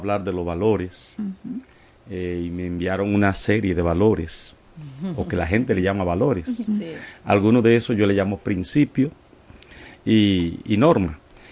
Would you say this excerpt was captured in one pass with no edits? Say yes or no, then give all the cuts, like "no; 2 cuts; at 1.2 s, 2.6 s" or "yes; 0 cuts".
yes; 0 cuts